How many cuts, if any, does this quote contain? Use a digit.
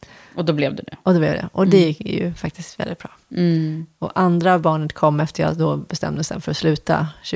0